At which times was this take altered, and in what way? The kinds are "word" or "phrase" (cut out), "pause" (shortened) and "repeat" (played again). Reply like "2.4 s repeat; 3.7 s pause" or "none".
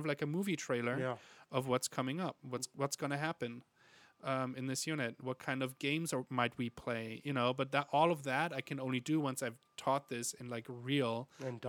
none